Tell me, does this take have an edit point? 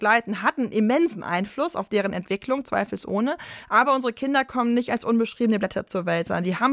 no; 0 cuts

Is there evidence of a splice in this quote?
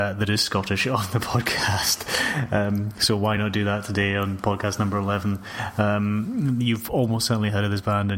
no; 0 cuts

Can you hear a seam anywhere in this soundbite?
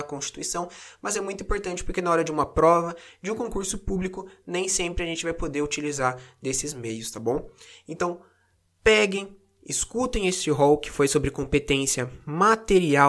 no; 0 cuts

